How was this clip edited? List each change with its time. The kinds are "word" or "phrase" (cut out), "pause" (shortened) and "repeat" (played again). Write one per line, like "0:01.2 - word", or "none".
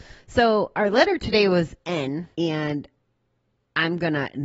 0:02.3 - pause